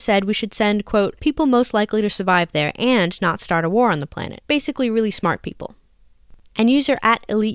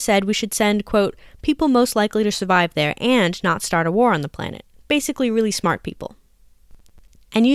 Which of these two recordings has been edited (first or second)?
first